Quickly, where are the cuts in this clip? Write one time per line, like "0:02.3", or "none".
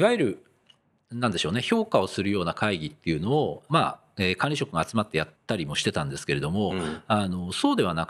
0:05.4